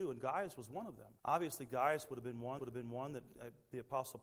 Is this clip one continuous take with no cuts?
no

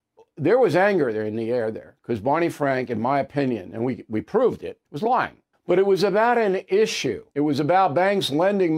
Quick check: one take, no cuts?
no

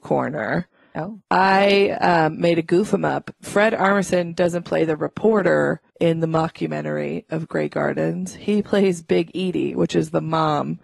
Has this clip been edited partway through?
yes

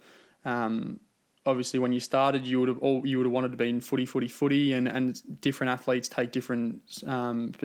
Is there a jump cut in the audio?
no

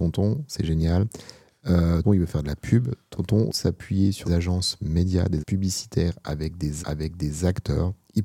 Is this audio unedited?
no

